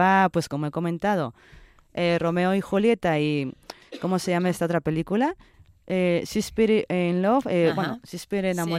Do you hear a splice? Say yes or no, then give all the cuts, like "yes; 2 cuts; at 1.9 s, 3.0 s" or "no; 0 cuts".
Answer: no; 0 cuts